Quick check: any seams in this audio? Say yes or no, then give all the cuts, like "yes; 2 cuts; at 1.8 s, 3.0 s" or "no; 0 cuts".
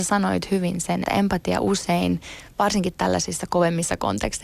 yes; 1 cut; at 1.0 s